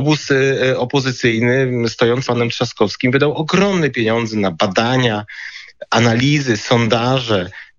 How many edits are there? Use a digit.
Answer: 1